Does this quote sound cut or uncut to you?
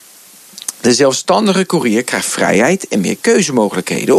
uncut